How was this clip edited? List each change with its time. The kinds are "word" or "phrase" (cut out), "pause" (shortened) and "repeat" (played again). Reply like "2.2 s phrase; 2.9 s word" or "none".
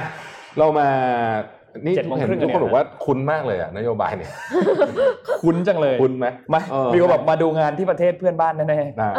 6.4 s pause